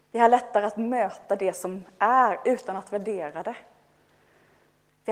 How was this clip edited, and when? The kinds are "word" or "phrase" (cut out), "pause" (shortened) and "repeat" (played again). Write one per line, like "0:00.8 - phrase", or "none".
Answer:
none